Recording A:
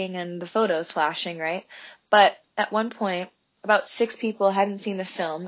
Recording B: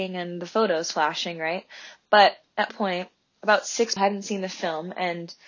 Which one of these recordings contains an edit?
B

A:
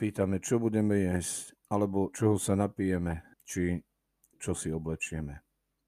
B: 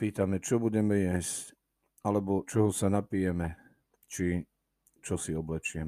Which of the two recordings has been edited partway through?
A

